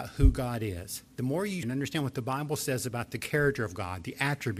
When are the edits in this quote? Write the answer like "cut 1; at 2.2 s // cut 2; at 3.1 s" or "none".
cut 1; at 1.6 s